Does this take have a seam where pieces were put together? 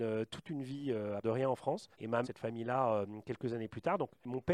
yes; 3 cuts; at 1.2 s, 1.9 s, 2.2 s

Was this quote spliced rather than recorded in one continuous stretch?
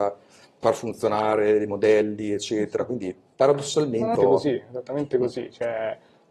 yes; 2 cuts; at 3.3 s, 4.1 s

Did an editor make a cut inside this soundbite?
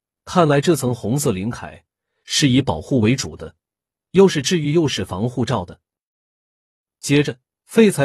no; 0 cuts

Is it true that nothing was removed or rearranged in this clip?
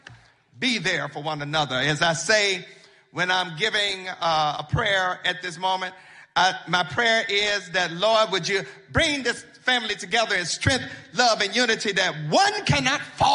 yes; 0 cuts

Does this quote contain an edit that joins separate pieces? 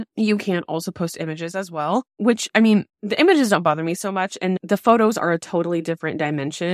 yes; 2 cuts; at 2.1 s, 2.9 s

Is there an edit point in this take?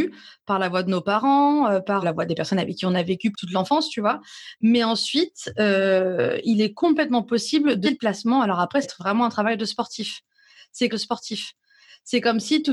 yes; 5 cuts; at 2.0 s, 3.3 s, 7.8 s, 8.8 s, 10.9 s

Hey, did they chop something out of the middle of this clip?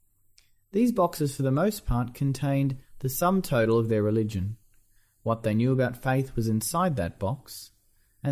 no; 0 cuts

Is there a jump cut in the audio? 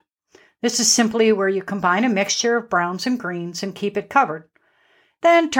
no; 0 cuts

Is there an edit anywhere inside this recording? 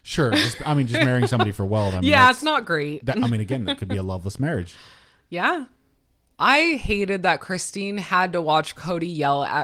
no; 0 cuts

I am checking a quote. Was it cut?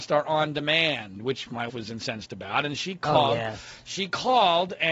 yes; 1 cut; at 1.7 s

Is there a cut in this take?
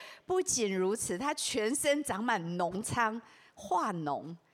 no; 0 cuts

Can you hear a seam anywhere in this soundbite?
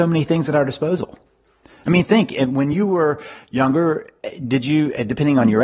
no; 0 cuts

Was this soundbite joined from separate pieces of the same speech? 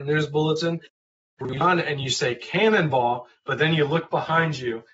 no; 0 cuts

